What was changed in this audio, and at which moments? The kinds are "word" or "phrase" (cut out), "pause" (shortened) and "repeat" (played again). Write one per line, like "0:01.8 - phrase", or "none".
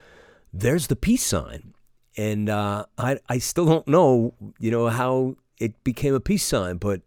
none